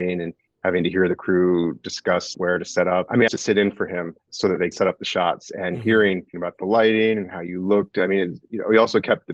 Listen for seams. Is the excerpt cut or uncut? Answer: cut